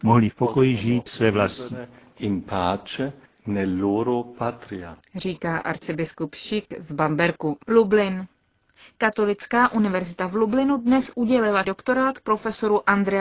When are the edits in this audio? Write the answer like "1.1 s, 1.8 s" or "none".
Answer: 1.1 s, 7.6 s, 11.6 s